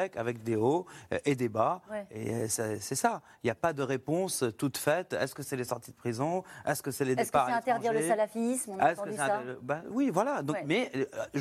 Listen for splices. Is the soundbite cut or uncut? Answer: uncut